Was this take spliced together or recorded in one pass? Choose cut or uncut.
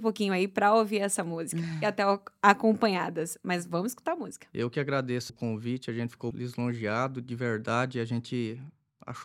cut